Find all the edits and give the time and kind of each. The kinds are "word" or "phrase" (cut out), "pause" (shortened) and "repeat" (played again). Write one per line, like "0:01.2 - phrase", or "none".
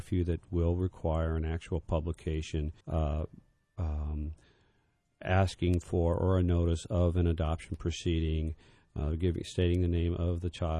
0:02.8 - pause